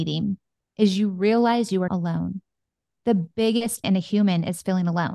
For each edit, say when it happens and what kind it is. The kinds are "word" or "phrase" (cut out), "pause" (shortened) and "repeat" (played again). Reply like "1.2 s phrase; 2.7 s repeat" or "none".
1.9 s word; 3.8 s word